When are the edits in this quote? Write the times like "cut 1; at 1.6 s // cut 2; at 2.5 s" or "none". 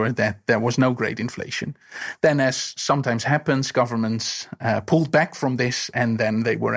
none